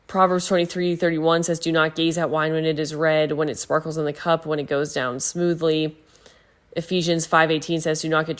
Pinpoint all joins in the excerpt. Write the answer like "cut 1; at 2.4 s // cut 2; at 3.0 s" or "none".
none